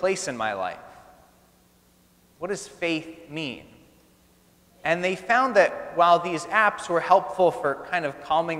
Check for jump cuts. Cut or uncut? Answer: uncut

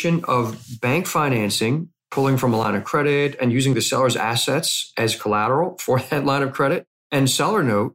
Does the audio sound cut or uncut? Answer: cut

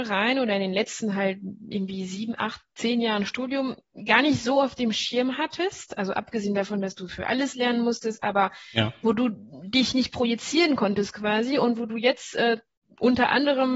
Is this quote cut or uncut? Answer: uncut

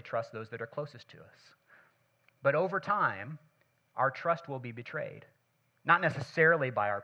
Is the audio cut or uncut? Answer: uncut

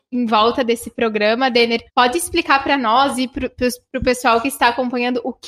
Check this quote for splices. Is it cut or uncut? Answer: cut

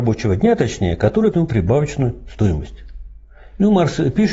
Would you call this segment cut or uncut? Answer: cut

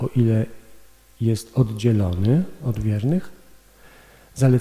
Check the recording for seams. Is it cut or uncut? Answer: uncut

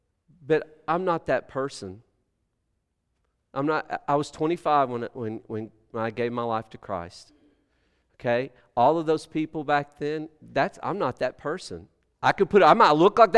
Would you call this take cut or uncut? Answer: uncut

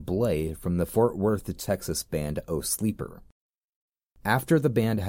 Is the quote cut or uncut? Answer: uncut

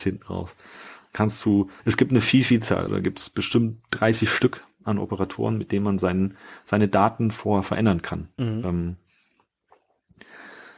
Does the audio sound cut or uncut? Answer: cut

